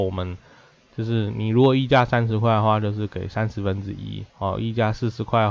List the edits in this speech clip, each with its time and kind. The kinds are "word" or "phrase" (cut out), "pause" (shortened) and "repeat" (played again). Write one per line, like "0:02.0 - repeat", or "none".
0:04.3 - pause